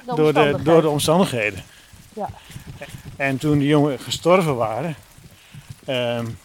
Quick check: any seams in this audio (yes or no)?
no